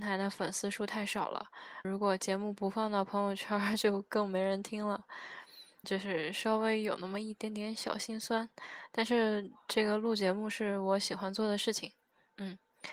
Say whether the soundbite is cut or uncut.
cut